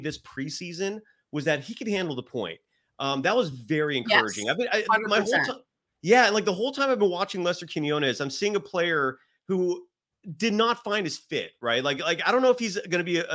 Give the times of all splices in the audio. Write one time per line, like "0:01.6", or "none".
none

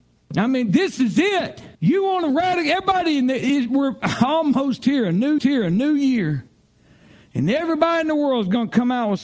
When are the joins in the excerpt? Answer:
0:01.7
0:05.4

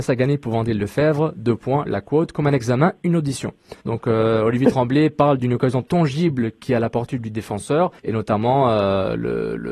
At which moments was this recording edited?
0:03.8
0:08.0

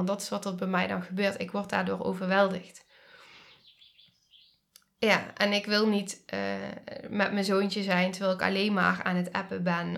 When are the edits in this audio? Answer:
none

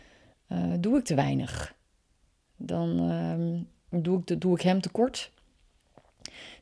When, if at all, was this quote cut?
none

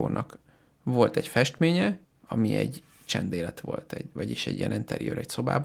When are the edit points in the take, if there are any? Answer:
0:02.0

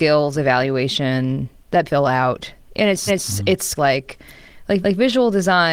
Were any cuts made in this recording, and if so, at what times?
0:01.9
0:03.1
0:03.8
0:04.8

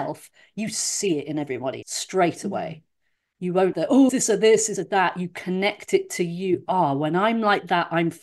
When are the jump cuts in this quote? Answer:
0:01.8
0:03.7
0:04.1
0:04.8

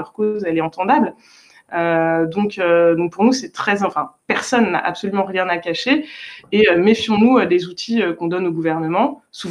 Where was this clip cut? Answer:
none

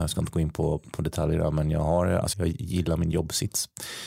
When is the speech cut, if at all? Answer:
0:02.3

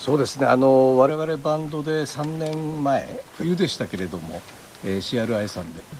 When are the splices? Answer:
none

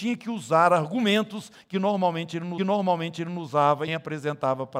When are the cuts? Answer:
0:02.6
0:03.9

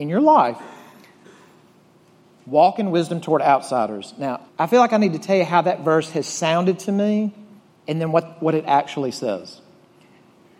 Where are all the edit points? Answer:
0:04.5
0:07.6

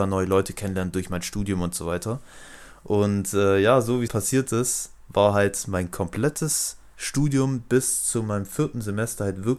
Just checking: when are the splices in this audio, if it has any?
0:04.1

